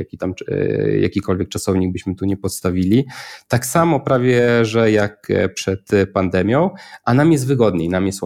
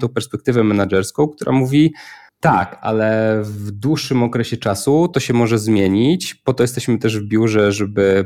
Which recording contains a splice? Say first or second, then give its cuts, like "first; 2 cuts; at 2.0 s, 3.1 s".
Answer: second; 1 cut; at 2.3 s